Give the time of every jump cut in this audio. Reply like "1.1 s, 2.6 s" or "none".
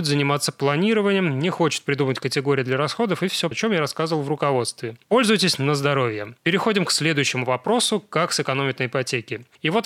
3.5 s, 5.0 s, 6.4 s

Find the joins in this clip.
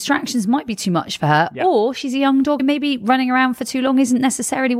2.6 s

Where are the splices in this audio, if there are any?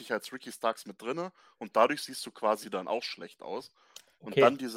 none

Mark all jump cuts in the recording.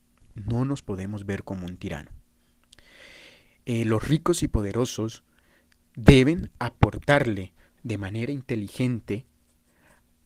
none

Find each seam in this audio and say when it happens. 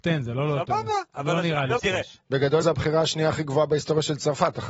1.1 s, 1.8 s, 2.6 s

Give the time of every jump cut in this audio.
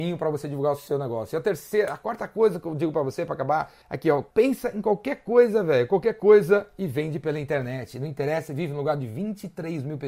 3.8 s, 4.3 s

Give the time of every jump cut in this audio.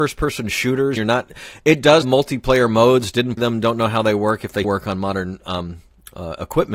1.0 s, 2.0 s, 3.4 s, 4.6 s

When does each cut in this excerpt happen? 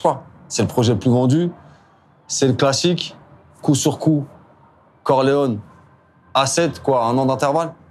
none

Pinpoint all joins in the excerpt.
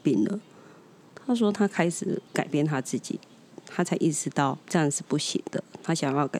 2.3 s

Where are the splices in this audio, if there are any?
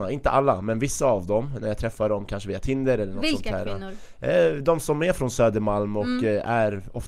none

